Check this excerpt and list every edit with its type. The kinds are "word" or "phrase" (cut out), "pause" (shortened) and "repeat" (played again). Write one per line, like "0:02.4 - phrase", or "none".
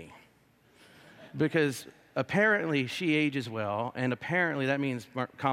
0:01.3 - pause